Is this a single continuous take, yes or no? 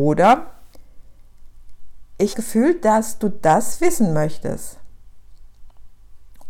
no